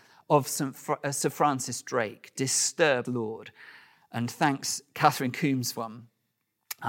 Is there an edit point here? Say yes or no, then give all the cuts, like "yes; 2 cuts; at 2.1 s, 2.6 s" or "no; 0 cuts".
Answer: yes; 2 cuts; at 3.0 s, 5.7 s